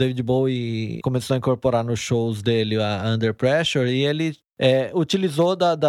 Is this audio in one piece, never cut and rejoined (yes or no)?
no